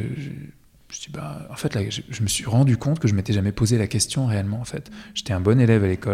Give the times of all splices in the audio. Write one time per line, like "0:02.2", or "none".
none